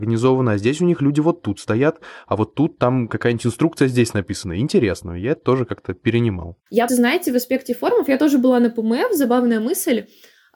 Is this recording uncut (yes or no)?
no